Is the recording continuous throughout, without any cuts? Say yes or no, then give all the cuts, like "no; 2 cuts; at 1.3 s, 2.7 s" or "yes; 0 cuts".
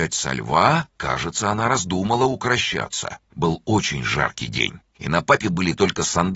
no; 3 cuts; at 0.9 s, 3.2 s, 4.9 s